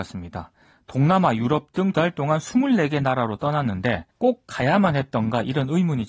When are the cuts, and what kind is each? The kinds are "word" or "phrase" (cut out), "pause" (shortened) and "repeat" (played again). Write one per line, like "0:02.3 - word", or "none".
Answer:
0:01.9 - word
0:04.1 - pause